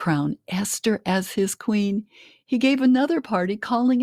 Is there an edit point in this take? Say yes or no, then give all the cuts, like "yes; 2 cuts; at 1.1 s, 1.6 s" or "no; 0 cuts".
no; 0 cuts